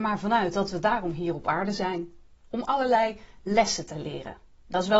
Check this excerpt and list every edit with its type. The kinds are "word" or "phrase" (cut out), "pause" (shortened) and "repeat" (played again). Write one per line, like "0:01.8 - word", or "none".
none